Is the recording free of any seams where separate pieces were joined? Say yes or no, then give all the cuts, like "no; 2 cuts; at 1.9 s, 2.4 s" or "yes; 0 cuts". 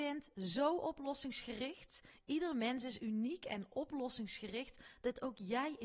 yes; 0 cuts